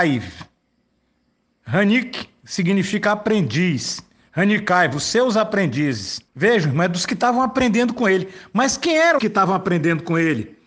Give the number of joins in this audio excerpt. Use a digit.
2